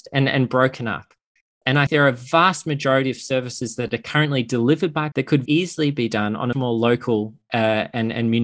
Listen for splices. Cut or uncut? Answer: cut